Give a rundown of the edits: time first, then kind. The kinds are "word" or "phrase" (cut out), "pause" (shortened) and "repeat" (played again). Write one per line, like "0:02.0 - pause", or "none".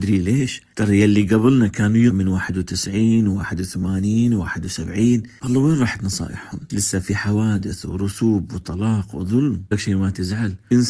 0:02.1 - word
0:06.7 - word
0:09.7 - word